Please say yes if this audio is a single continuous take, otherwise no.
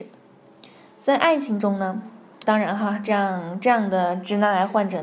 no